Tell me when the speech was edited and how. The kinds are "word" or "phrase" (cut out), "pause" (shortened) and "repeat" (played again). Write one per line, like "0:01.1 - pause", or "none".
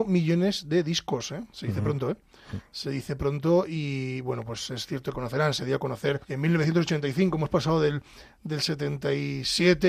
0:05.1 - phrase
0:06.2 - pause